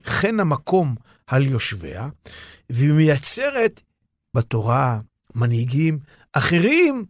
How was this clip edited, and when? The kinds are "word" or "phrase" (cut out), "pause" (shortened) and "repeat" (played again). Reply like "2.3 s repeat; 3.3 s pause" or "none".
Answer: 4.3 s word